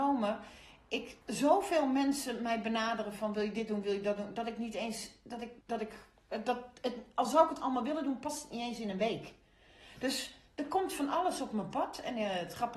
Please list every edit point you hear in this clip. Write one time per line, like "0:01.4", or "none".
0:01.2
0:05.6